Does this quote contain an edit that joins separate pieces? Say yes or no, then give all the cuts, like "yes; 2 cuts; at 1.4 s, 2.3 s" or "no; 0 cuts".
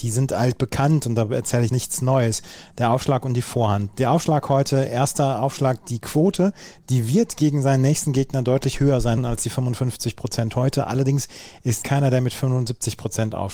yes; 3 cuts; at 1.7 s, 9.2 s, 11.8 s